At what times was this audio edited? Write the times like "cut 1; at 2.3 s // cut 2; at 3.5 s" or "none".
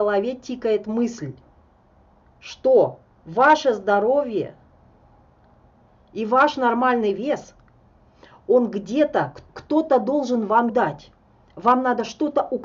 cut 1; at 9.5 s // cut 2; at 10.7 s